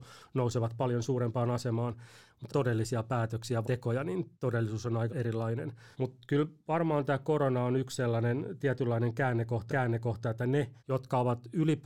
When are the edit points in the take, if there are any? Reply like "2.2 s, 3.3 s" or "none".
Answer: 2.5 s, 3.6 s, 4.3 s, 5.1 s, 5.9 s, 9.7 s, 10.8 s